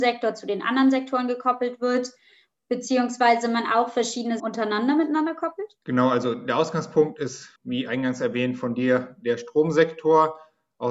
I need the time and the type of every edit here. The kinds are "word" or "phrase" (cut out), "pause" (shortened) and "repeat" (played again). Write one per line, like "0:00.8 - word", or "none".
0:04.4 - word
0:05.8 - pause
0:07.6 - pause